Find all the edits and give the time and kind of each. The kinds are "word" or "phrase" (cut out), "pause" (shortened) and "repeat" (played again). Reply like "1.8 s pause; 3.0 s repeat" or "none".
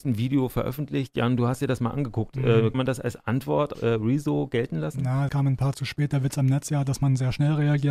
2.7 s word; 3.7 s word; 5.3 s word; 5.7 s word; 6.7 s word